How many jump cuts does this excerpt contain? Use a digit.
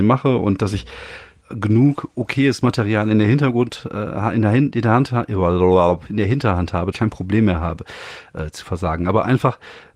2